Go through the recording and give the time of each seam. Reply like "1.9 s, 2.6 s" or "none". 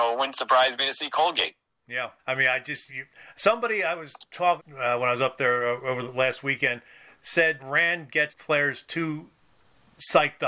2.2 s, 2.9 s, 4.6 s, 7.6 s, 8.3 s